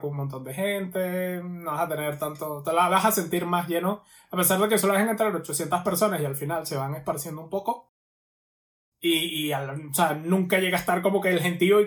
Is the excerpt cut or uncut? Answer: uncut